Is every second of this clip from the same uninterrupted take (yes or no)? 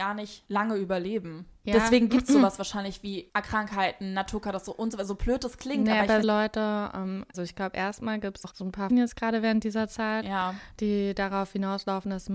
no